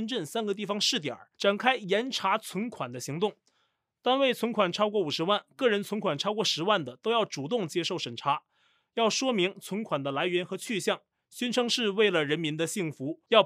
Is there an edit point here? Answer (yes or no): yes